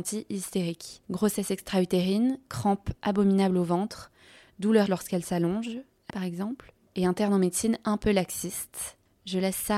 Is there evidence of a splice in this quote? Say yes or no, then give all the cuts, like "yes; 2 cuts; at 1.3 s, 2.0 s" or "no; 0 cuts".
yes; 2 cuts; at 4.9 s, 6.1 s